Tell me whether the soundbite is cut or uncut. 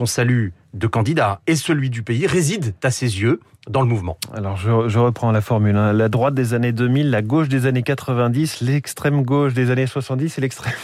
uncut